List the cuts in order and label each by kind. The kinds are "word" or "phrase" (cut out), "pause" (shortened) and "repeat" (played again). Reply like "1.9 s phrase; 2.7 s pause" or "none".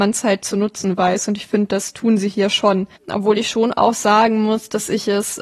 3.0 s pause